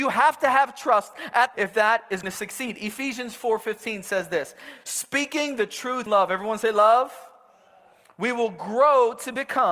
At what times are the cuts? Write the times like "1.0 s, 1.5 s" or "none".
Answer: 1.5 s, 2.2 s, 6.1 s